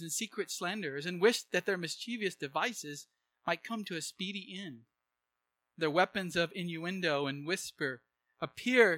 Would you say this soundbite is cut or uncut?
uncut